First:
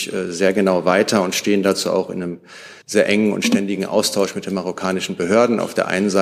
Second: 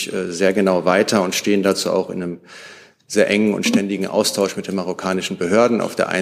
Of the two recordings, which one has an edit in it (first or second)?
first